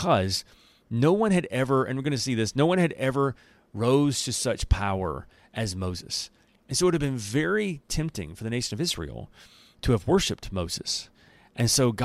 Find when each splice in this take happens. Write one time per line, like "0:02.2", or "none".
none